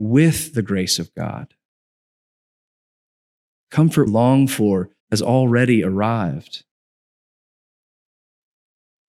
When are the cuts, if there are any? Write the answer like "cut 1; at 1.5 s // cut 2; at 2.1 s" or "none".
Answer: cut 1; at 4.1 s // cut 2; at 5.0 s